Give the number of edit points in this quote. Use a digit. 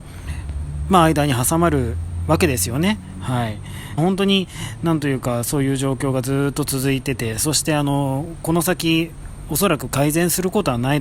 1